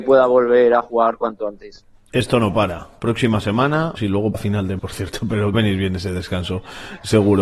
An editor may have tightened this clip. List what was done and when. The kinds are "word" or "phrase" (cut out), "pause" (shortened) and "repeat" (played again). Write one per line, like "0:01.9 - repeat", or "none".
0:04.0 - word
0:04.3 - word
0:04.8 - word
0:05.5 - phrase